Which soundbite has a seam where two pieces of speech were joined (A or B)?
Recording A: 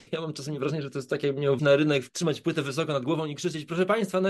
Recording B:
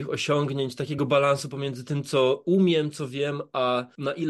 A